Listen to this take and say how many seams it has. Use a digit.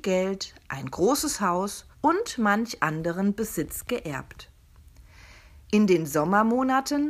1